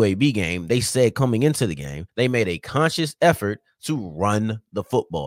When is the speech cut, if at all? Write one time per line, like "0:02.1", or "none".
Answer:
0:02.1